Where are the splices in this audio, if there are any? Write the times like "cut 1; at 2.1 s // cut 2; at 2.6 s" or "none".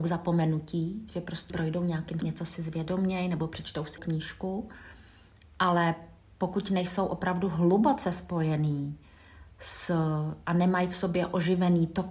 cut 1; at 1.5 s // cut 2; at 2.2 s // cut 3; at 4.0 s

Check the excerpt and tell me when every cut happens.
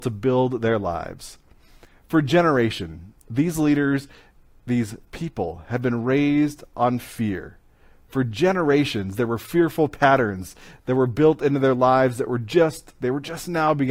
none

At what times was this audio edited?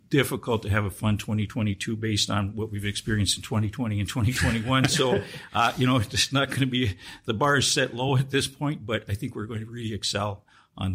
none

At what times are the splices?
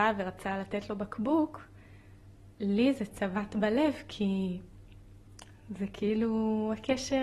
none

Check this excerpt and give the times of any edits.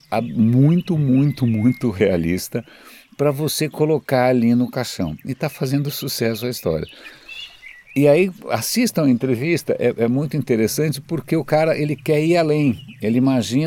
none

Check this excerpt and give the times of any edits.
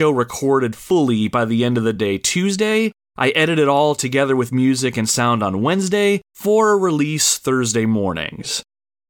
none

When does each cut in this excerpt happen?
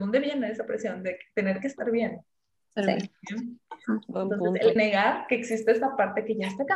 cut 1; at 4.8 s

